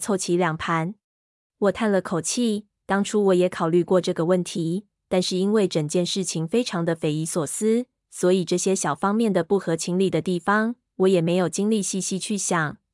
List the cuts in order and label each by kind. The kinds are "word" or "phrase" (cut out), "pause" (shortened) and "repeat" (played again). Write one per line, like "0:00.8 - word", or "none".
0:01.0 - pause